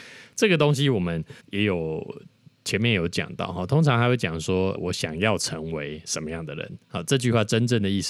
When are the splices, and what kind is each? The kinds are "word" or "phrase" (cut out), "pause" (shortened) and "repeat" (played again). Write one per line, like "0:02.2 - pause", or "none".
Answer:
0:01.4 - pause
0:02.6 - pause
0:04.7 - word
0:06.8 - pause